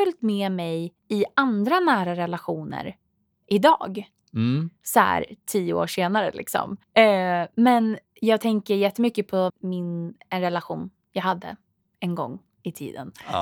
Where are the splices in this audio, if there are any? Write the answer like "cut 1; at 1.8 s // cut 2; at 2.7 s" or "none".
cut 1; at 1.0 s // cut 2; at 6.8 s // cut 3; at 9.5 s